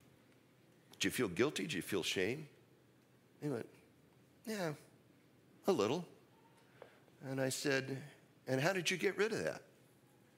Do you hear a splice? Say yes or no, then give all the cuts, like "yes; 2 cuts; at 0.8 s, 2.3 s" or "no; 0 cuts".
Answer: no; 0 cuts